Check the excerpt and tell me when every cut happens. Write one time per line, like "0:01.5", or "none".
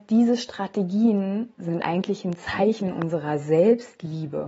none